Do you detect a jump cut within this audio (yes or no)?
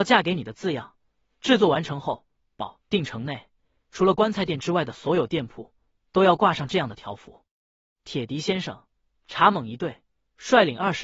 no